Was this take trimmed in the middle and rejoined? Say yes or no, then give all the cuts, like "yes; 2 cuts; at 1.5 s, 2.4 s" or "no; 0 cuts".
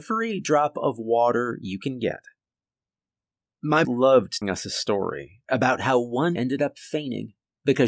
yes; 3 cuts; at 3.8 s, 4.4 s, 6.4 s